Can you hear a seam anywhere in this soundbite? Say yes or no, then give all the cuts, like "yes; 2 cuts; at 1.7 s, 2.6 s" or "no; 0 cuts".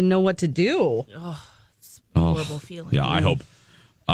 no; 0 cuts